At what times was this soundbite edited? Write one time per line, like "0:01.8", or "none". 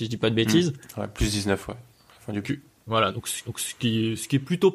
0:02.4
0:03.4